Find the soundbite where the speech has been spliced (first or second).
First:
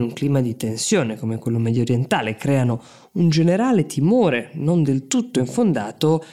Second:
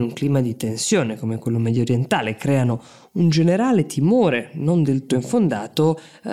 second